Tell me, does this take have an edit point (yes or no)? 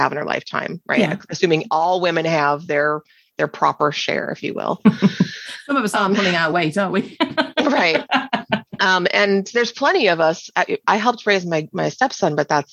no